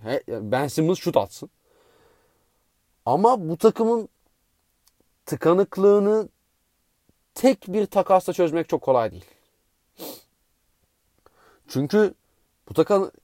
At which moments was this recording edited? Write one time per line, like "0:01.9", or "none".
none